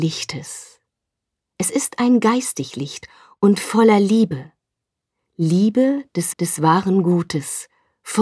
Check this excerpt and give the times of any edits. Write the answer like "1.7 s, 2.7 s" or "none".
6.3 s